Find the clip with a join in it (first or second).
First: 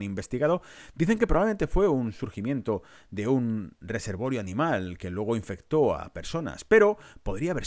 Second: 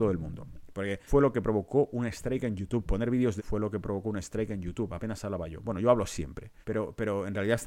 second